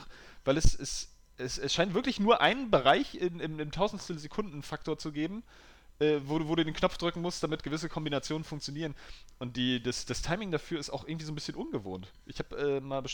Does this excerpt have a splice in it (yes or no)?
no